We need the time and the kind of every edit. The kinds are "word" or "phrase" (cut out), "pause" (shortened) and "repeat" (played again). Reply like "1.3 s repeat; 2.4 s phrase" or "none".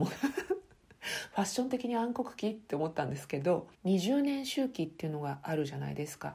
3.7 s pause